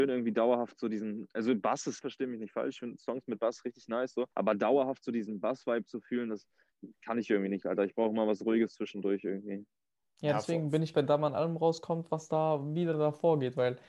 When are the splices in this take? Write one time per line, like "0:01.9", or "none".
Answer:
0:02.0
0:04.3
0:10.9